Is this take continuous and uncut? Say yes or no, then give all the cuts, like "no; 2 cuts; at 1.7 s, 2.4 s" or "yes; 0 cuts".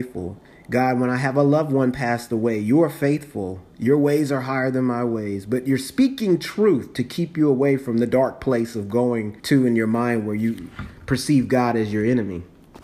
no; 1 cut; at 9.4 s